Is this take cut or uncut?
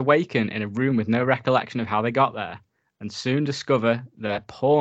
uncut